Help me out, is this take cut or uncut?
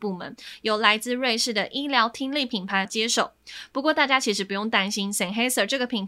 cut